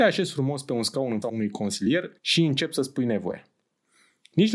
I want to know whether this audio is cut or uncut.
cut